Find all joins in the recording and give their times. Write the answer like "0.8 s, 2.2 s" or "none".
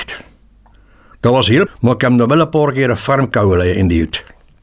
1.7 s